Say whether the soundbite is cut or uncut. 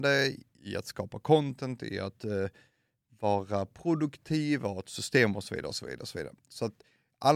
uncut